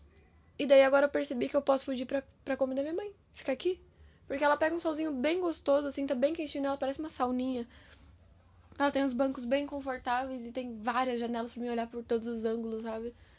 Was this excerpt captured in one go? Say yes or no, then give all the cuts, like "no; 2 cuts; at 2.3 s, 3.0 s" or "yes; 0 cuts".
yes; 0 cuts